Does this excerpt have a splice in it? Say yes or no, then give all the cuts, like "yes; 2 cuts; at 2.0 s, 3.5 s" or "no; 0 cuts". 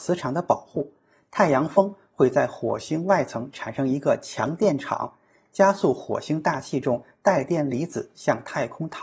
no; 0 cuts